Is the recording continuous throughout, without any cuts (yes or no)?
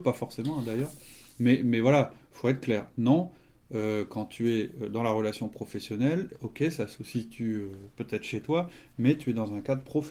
yes